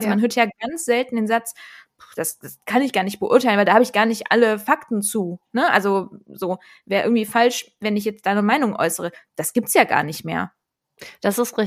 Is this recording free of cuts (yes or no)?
yes